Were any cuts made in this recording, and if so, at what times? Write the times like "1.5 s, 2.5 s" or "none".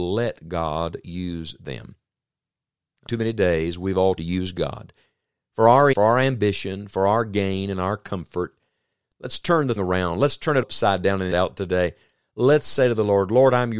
3.1 s, 4.2 s, 5.9 s, 9.8 s, 10.6 s, 11.3 s